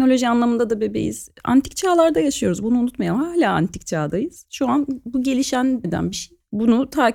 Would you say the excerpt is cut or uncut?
cut